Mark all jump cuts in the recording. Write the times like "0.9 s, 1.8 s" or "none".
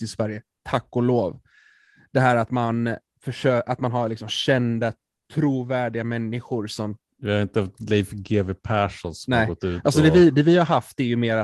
none